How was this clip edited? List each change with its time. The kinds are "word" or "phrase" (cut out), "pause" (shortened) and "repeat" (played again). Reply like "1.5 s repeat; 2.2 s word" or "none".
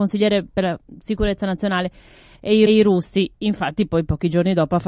2.7 s repeat